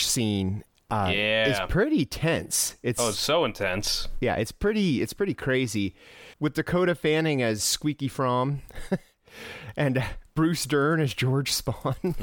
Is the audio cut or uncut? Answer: cut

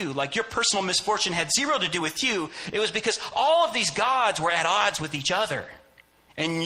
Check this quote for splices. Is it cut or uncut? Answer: uncut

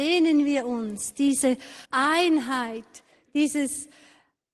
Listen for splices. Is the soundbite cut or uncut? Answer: cut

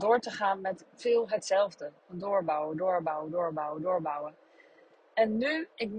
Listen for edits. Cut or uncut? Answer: cut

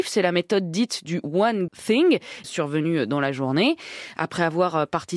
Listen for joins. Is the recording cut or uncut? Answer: cut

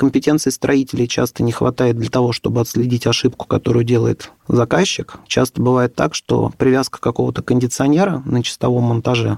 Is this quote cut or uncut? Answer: cut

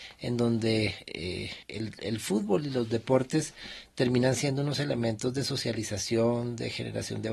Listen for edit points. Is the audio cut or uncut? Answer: cut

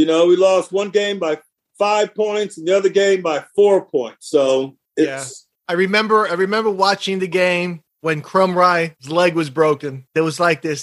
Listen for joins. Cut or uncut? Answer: cut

